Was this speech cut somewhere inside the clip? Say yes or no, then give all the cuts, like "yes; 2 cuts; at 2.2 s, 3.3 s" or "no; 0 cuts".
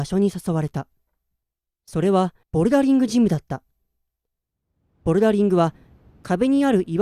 yes; 1 cut; at 2.4 s